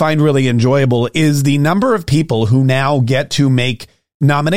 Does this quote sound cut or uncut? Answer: uncut